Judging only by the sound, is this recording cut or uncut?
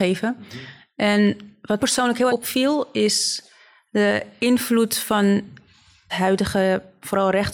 cut